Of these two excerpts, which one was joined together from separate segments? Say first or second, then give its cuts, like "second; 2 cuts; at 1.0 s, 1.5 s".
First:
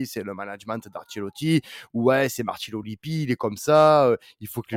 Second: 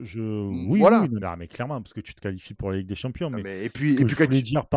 second; 2 cuts; at 1.2 s, 2.6 s